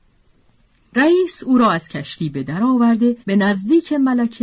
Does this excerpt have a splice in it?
yes; 1 cut; at 3.2 s

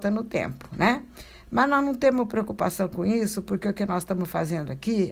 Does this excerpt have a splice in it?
no; 0 cuts

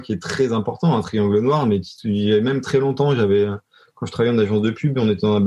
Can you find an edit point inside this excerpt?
no; 0 cuts

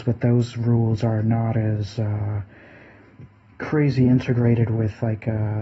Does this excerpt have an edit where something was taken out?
no; 0 cuts

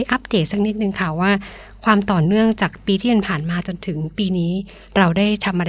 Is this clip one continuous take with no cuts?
yes; 0 cuts

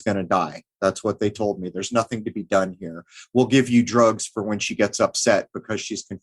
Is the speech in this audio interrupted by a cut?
no; 0 cuts

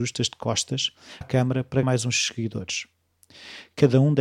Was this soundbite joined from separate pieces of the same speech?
yes; 2 cuts; at 1.2 s, 1.8 s

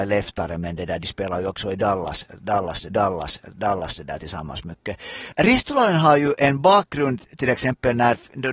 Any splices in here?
yes; 1 cut; at 2.9 s

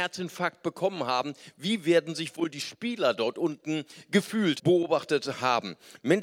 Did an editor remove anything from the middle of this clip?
yes; 1 cut; at 4.6 s

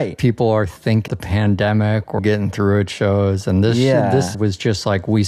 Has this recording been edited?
yes; 3 cuts; at 1.1 s, 2.2 s, 4.3 s

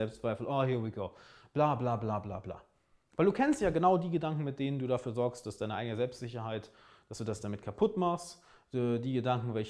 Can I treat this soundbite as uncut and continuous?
yes; 0 cuts

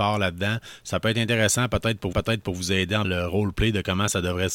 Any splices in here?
yes; 2 cuts; at 2.1 s, 3.0 s

